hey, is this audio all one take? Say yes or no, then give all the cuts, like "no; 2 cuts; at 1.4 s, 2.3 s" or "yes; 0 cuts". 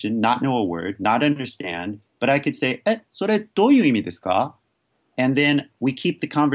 no; 1 cut; at 4.9 s